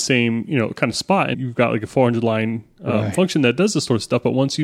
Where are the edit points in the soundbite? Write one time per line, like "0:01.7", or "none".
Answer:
0:01.3